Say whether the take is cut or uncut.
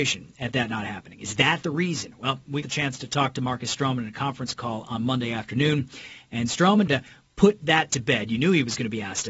cut